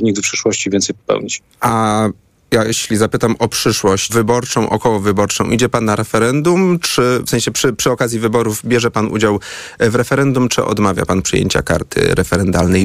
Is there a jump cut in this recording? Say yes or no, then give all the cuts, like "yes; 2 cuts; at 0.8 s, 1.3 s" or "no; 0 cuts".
yes; 2 cuts; at 1.5 s, 4.1 s